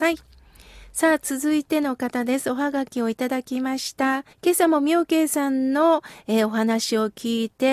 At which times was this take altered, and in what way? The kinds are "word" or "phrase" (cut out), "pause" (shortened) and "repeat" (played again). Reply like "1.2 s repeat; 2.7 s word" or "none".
4.3 s pause

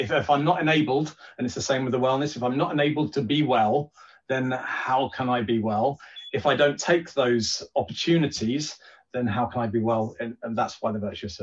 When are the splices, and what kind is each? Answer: none

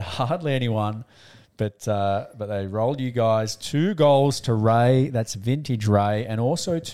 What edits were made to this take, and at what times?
none

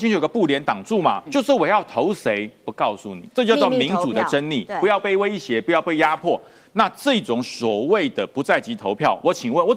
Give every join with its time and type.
1.3 s word; 3.3 s word

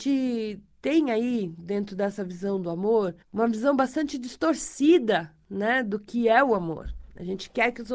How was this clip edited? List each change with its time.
3.2 s pause

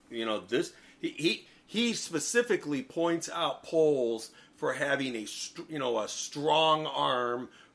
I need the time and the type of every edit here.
none

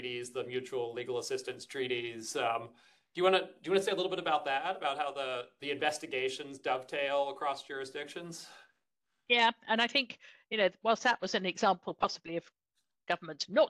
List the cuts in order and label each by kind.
none

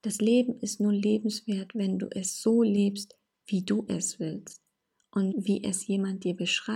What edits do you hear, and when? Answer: 5.3 s word

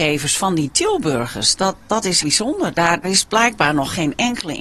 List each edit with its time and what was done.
2.2 s word; 3.0 s word

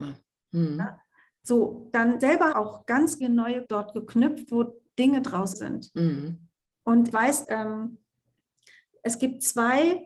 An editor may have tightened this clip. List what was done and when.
2.2 s word; 2.5 s word; 3.2 s word; 3.7 s word; 5.5 s word; 7.1 s word; 7.4 s word

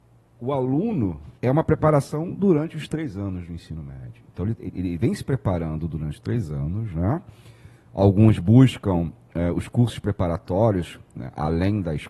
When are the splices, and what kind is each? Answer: 1.4 s pause

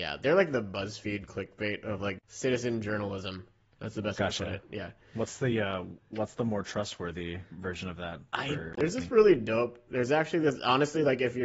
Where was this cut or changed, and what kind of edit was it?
none

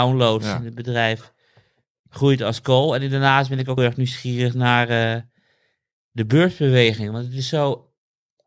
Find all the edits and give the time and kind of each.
3.8 s word

